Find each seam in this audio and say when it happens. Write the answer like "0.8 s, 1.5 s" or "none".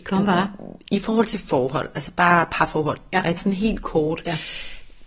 3.4 s